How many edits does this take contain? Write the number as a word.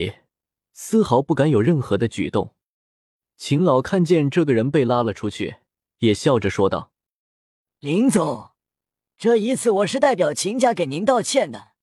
zero